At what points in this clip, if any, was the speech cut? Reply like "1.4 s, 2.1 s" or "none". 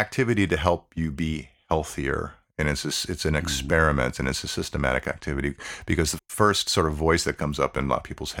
6.2 s